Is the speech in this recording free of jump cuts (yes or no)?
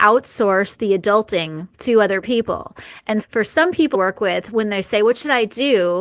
no